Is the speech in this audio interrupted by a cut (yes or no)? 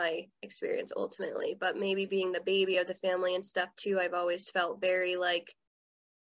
no